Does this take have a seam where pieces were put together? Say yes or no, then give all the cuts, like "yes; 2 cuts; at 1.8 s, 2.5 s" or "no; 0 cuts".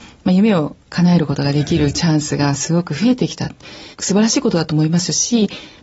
yes; 1 cut; at 3.9 s